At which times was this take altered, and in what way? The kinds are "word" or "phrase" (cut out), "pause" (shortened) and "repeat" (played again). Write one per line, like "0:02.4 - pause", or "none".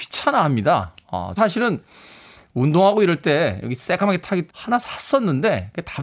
0:01.4 - word
0:03.6 - word
0:04.5 - word